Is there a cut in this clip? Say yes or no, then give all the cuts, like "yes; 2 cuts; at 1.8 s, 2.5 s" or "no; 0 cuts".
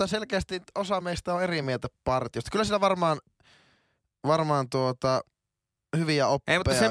no; 0 cuts